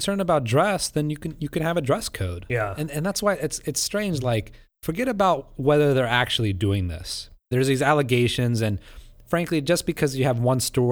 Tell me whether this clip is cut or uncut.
uncut